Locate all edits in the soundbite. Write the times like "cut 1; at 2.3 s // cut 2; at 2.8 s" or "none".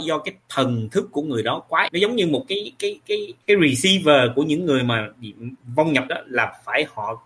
cut 1; at 1.9 s // cut 2; at 3.4 s // cut 3; at 6.1 s